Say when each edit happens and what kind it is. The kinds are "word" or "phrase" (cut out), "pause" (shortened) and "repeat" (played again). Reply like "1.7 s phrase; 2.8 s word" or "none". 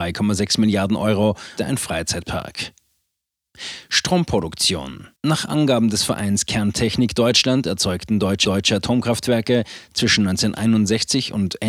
1.6 s phrase; 5.2 s pause; 8.4 s repeat